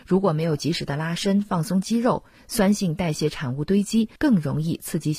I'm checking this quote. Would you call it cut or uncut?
cut